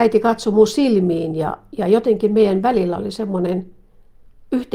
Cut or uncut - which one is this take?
uncut